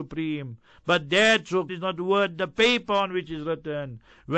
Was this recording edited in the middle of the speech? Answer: yes; 1 cut; at 1.7 s

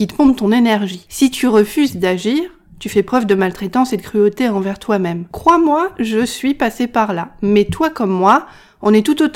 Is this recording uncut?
yes; 0 cuts

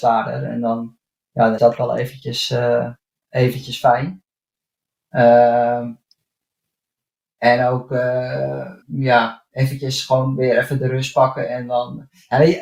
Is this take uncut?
no; 2 cuts; at 1.6 s, 8.8 s

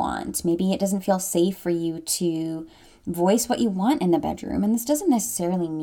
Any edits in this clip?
no; 0 cuts

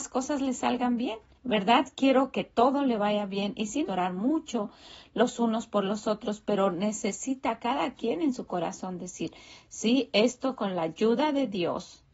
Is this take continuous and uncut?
no; 3 cuts; at 1.3 s, 2.3 s, 3.9 s

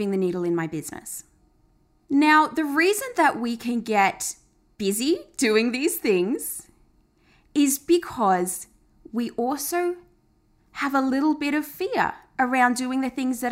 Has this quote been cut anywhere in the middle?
no; 0 cuts

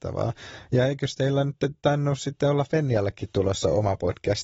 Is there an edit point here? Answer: no; 0 cuts

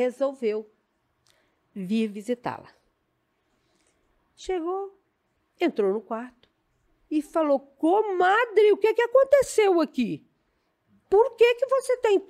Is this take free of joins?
yes; 0 cuts

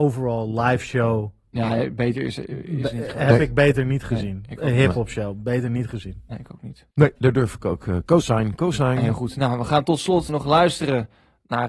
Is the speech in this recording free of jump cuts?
no; 2 cuts; at 6.9 s, 10.3 s

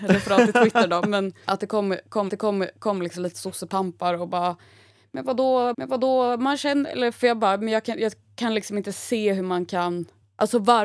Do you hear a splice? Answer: yes; 2 cuts; at 2.3 s, 5.7 s

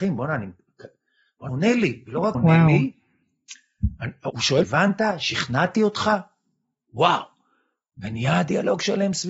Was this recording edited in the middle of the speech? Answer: yes; 4 cuts; at 1.5 s, 2.3 s, 4.3 s, 4.6 s

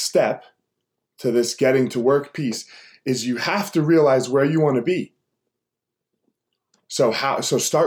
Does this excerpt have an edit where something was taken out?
no; 0 cuts

